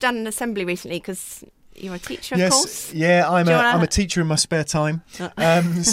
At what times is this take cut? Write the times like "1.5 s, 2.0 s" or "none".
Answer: 1.5 s